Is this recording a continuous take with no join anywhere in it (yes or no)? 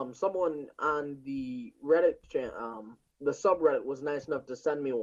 no